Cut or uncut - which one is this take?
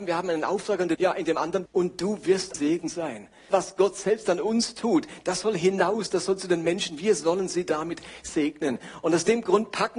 cut